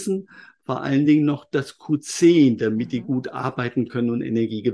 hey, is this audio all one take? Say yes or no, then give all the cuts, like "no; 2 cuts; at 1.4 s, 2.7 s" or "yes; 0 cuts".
yes; 0 cuts